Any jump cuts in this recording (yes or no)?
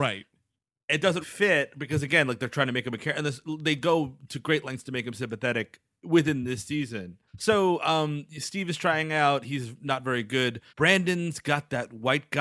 yes